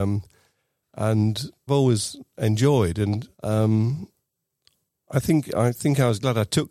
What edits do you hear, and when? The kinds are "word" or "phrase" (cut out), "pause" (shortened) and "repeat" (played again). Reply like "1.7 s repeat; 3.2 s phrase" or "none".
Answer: 1.7 s phrase; 3.3 s pause